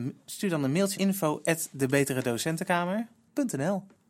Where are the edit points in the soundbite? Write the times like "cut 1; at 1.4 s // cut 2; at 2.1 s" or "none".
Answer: cut 1; at 0.9 s

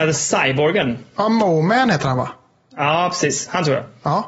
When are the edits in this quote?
none

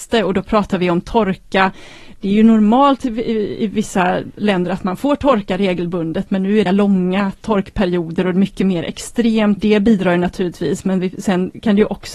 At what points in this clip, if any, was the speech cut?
cut 1; at 6.7 s // cut 2; at 9.6 s

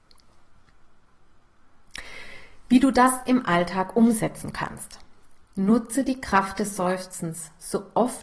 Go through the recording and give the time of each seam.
cut 1; at 5.4 s

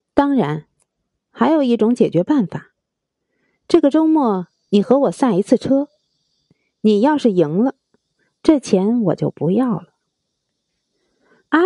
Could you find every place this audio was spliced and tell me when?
none

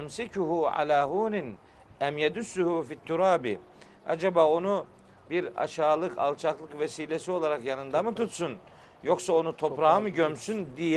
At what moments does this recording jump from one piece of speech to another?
none

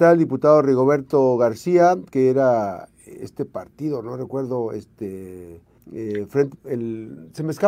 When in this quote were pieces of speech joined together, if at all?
cut 1; at 5.8 s // cut 2; at 6.6 s

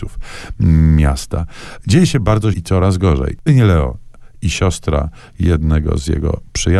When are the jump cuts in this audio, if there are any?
cut 1; at 2.5 s // cut 2; at 3.5 s

